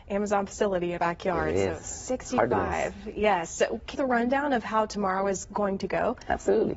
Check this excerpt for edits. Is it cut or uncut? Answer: cut